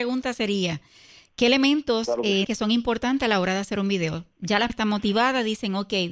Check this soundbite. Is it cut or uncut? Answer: cut